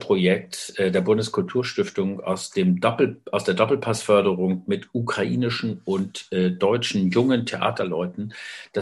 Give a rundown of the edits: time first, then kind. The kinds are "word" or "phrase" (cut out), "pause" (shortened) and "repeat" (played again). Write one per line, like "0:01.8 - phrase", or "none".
none

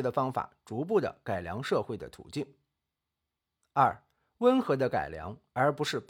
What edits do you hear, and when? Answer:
none

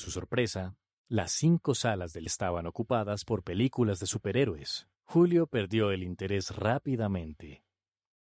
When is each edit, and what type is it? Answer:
0:02.3 - word
0:04.9 - pause

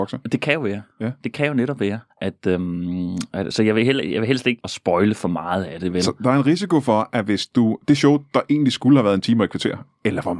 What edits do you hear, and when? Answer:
0:02.1 - pause
0:03.5 - word
0:04.6 - phrase

